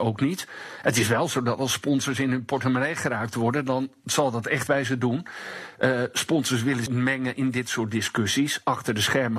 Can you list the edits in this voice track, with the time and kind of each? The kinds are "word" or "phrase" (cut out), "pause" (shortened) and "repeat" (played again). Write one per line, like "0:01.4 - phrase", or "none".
0:04.7 - word
0:06.9 - phrase